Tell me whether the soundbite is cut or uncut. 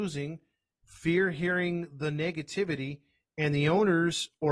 uncut